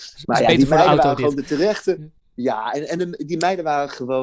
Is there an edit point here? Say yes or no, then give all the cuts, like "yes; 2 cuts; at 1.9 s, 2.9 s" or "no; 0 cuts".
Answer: no; 0 cuts